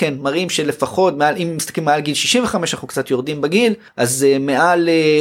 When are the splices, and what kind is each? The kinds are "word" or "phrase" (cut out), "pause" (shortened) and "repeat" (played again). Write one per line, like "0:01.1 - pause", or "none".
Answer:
none